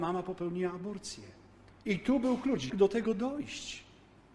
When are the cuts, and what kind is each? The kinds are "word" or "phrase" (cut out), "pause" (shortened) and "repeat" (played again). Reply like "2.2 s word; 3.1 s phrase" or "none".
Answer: 1.8 s pause; 2.7 s word